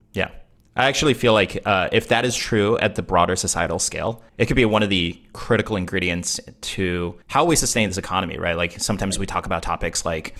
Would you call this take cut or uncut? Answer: cut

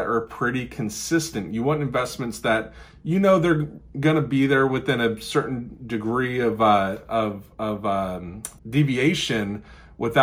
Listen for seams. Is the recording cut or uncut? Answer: cut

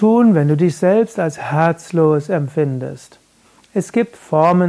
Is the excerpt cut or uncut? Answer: uncut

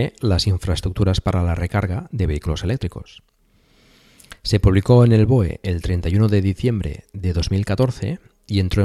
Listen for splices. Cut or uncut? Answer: uncut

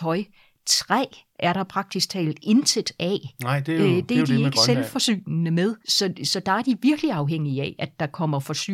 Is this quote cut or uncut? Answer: cut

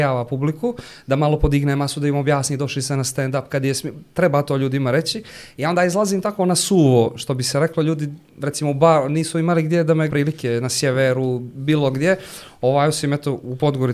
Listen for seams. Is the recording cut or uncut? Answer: cut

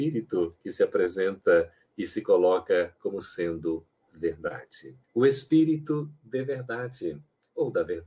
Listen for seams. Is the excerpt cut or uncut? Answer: cut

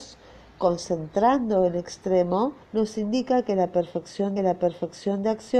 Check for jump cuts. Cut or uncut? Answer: cut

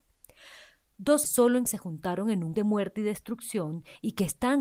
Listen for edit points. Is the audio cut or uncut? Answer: cut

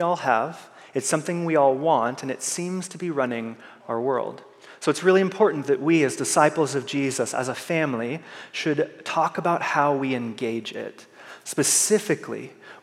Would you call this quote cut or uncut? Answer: uncut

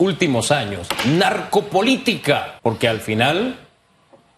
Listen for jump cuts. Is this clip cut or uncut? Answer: cut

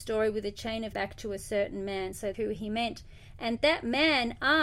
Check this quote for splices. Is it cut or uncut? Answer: cut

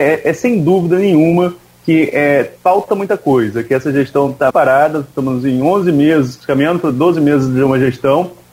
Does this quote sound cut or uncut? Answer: cut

